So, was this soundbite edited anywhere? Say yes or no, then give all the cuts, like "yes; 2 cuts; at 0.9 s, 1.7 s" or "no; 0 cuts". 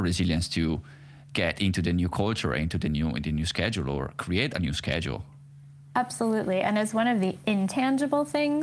no; 0 cuts